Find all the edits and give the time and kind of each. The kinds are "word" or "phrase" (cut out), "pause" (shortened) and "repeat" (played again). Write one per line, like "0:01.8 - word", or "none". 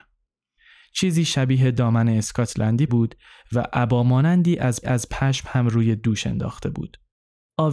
0:02.9 - word
0:04.8 - repeat